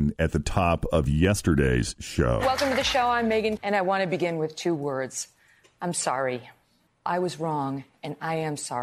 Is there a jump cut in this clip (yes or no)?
yes